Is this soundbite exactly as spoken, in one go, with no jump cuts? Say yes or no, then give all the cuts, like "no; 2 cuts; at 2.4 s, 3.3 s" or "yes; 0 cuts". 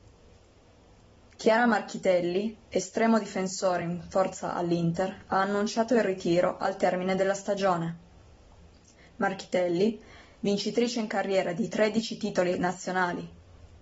yes; 0 cuts